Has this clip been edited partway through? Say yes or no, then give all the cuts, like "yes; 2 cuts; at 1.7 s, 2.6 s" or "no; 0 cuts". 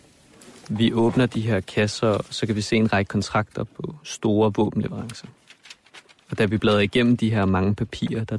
no; 0 cuts